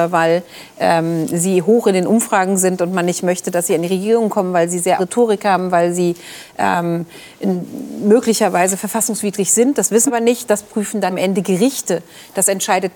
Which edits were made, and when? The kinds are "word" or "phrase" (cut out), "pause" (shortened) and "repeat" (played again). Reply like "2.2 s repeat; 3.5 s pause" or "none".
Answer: 5.0 s word; 10.1 s word; 11.1 s word